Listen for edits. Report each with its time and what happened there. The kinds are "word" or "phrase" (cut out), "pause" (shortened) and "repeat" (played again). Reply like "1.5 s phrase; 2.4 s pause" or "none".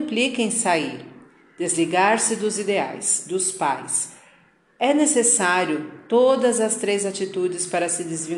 none